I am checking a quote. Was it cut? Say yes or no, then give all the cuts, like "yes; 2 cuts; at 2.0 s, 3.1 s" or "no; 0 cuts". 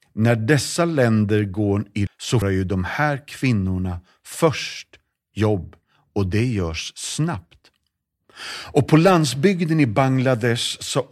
yes; 2 cuts; at 2.1 s, 2.4 s